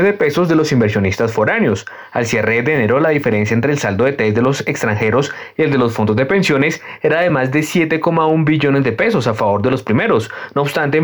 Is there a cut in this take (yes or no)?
no